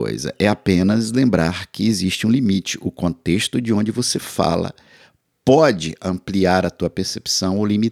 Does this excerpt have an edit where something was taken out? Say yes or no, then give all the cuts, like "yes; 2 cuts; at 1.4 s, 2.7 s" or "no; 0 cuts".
no; 0 cuts